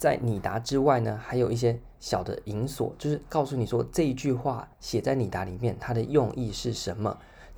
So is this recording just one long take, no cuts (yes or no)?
no